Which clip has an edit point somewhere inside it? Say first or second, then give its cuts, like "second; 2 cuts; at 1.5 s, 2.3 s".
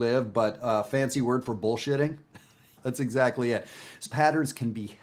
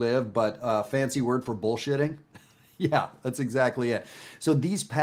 first; 2 cuts; at 2.8 s, 4.1 s